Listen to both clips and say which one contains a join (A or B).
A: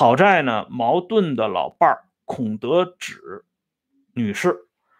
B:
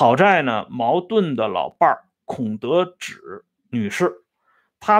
B